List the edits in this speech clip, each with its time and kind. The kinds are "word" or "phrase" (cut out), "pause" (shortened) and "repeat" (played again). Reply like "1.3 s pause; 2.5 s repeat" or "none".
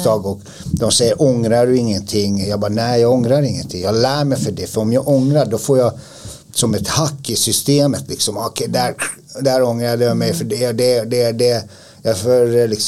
none